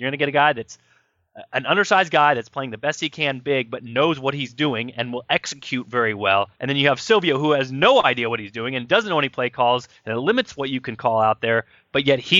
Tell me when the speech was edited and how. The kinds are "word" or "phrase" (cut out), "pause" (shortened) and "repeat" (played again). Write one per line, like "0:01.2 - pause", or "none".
0:06.5 - pause